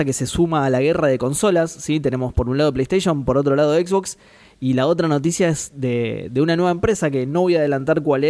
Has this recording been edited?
no; 0 cuts

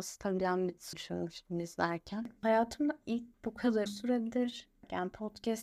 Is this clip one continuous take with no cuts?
no; 3 cuts; at 0.9 s, 3.3 s, 3.9 s

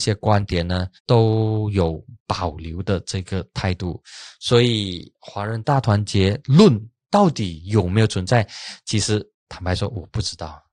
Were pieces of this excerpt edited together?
yes; 1 cut; at 1.0 s

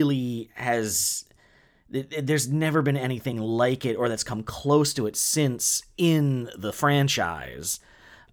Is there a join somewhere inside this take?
no; 0 cuts

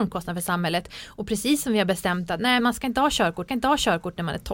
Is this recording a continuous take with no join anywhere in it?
no; 2 cuts; at 2.6 s, 3.5 s

